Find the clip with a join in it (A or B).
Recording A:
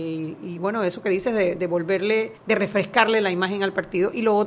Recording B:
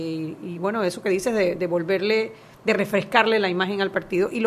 A